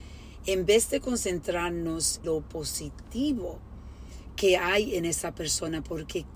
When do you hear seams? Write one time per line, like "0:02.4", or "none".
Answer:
0:02.2

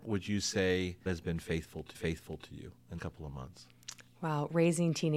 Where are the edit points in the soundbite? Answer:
0:01.1
0:01.9
0:03.0

